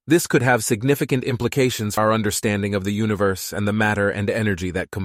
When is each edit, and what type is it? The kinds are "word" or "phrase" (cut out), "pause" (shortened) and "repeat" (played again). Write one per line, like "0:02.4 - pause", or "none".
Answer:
0:02.0 - word